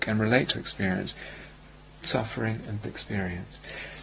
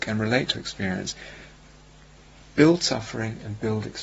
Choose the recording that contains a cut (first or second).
first